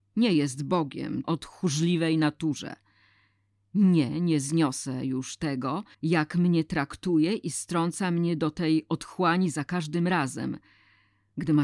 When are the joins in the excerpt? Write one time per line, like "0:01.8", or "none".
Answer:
0:01.2
0:05.9